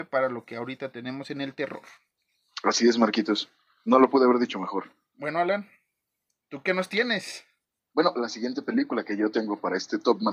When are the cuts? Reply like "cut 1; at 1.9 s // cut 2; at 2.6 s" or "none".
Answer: none